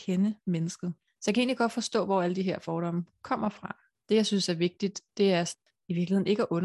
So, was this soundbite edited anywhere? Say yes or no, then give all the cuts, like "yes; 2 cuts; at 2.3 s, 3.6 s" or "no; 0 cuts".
no; 0 cuts